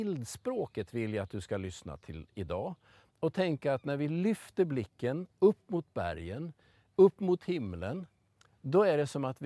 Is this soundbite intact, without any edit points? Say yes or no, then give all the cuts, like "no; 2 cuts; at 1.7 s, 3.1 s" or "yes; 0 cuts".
yes; 0 cuts